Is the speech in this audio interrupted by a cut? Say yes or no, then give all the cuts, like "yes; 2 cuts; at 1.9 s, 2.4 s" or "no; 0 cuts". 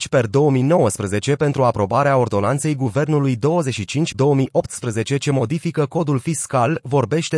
yes; 1 cut; at 4.1 s